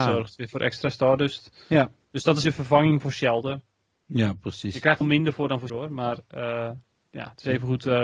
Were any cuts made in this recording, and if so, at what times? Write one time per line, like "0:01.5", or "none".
0:02.4
0:05.0
0:05.7